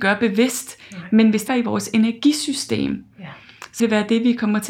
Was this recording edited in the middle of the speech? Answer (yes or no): yes